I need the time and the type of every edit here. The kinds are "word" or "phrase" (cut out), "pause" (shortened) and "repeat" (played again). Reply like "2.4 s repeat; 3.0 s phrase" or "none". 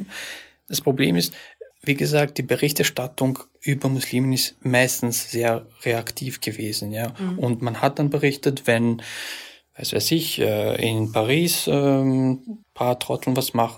1.7 s pause; 12.6 s pause